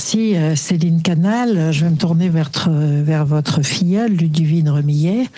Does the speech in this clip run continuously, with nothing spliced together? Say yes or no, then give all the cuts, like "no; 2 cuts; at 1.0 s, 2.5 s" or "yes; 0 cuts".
yes; 0 cuts